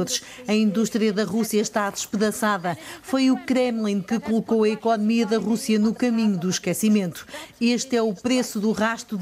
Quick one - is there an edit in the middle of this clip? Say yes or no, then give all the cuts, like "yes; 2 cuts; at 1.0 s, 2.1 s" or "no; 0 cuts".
no; 0 cuts